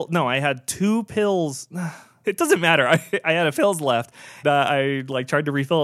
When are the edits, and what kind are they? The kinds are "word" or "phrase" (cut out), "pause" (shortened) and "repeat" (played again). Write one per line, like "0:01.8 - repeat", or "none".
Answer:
0:02.2 - word
0:03.5 - word
0:04.4 - word